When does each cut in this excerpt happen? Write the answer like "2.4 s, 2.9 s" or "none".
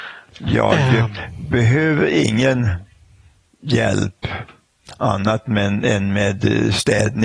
none

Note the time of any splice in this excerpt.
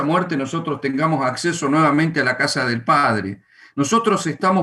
none

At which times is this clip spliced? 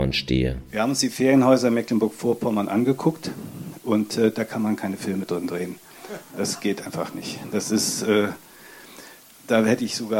none

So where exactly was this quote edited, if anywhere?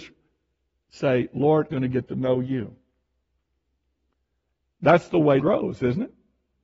1.7 s, 5.4 s

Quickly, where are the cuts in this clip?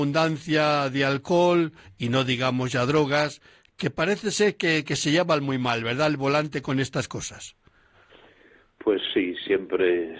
none

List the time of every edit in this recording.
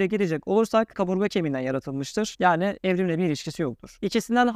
0.9 s

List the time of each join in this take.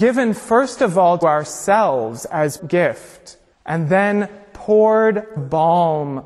1.2 s, 2.6 s, 3.5 s, 5.4 s

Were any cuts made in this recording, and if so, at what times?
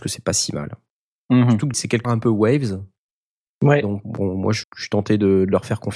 1.7 s, 2.0 s, 4.0 s, 4.6 s

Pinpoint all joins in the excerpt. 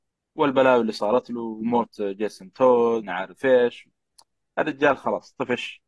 3.0 s

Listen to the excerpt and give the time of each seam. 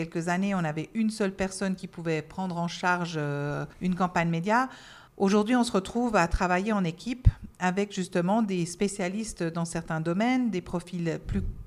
3.7 s, 5.1 s

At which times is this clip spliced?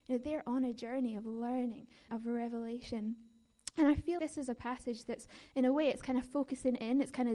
2.1 s, 4.2 s

